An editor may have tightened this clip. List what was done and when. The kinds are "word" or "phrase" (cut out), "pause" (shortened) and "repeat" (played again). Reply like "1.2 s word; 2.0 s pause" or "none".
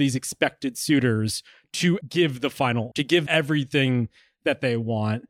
2.0 s word; 2.9 s word; 3.3 s word